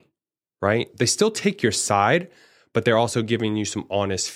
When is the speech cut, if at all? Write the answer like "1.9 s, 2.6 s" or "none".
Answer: none